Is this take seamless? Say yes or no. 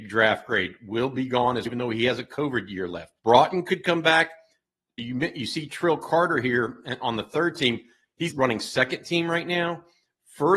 no